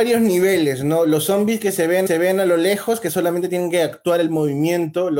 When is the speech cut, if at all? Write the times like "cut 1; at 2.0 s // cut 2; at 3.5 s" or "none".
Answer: cut 1; at 2.1 s